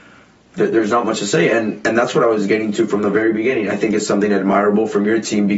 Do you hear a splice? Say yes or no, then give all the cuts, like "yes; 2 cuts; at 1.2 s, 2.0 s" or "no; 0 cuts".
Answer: no; 0 cuts